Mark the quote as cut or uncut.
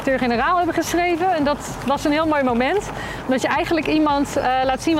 uncut